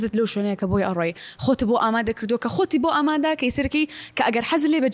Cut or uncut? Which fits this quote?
uncut